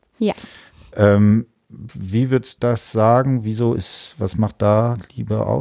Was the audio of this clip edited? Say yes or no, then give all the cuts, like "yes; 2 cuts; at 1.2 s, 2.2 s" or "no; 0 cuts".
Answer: yes; 1 cut; at 2.6 s